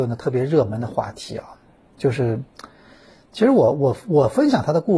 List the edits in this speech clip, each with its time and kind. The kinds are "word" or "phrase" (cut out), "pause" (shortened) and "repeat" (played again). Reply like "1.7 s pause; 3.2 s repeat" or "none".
none